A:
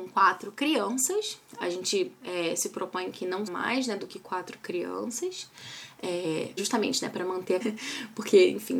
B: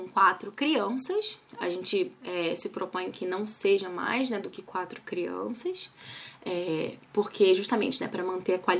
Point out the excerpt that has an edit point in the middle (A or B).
A